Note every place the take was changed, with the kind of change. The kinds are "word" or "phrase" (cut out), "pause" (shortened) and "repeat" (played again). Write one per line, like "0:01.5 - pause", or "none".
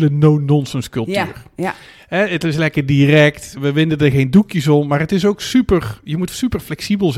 0:03.6 - word